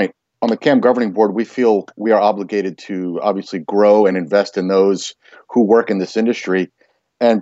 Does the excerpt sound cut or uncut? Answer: uncut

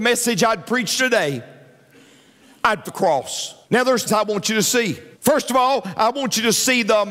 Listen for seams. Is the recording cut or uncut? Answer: cut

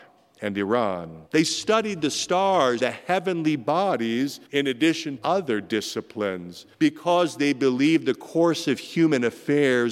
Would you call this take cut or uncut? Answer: cut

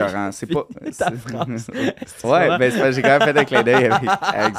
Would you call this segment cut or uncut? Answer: cut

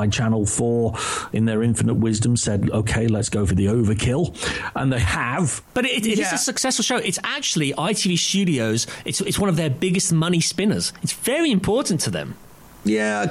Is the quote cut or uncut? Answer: cut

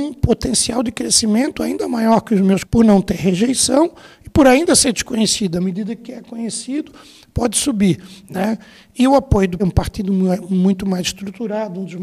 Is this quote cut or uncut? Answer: cut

